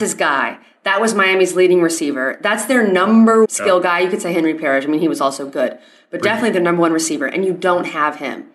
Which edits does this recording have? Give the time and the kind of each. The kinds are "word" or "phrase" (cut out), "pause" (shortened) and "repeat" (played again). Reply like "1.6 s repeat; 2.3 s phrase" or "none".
3.5 s word

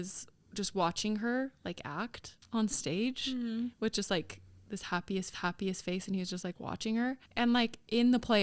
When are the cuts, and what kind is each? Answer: 5.3 s repeat; 7.3 s pause

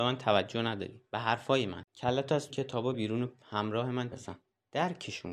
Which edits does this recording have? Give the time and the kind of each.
1.1 s pause; 2.5 s word; 2.9 s word; 4.1 s phrase

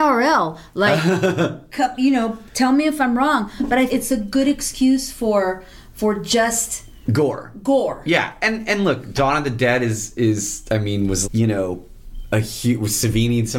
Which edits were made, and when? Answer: 3.9 s phrase; 11.2 s word

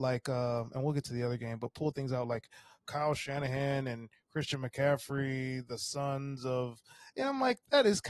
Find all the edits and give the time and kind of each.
none

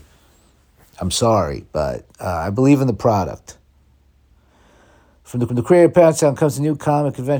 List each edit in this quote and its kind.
2.1 s pause; 5.5 s repeat

